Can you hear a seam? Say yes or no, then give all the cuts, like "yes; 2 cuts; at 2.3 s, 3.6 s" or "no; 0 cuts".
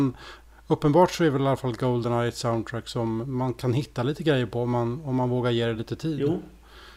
no; 0 cuts